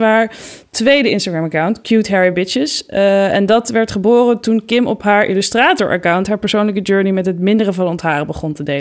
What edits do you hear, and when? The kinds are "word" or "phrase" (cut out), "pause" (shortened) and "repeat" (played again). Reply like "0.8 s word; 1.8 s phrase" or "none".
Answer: none